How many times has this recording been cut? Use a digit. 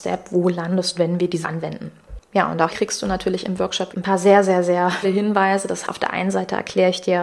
6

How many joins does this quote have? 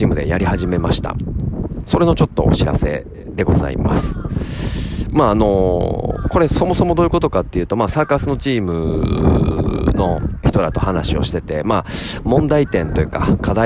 1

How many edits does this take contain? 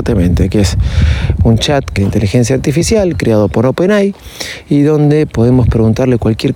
1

